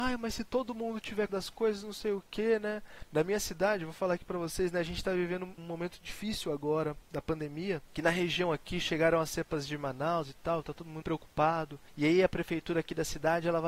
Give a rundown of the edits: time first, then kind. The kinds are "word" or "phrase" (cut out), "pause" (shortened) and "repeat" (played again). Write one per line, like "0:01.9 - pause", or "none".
0:01.3 - word
0:05.6 - word
0:11.0 - word